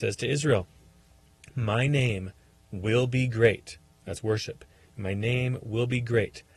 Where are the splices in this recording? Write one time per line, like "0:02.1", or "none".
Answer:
none